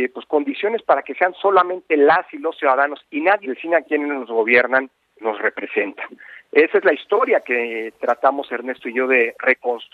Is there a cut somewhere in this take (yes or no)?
yes